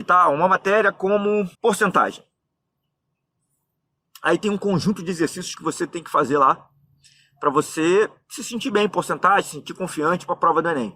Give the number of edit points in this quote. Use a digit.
1